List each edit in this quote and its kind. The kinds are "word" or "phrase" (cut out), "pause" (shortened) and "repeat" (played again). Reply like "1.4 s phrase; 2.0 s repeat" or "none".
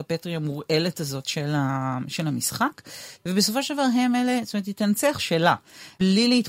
5.2 s word